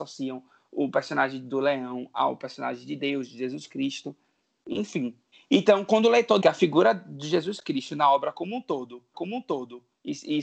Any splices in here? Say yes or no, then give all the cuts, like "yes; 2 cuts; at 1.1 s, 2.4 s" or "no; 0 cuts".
yes; 3 cuts; at 5.3 s, 6.4 s, 9.1 s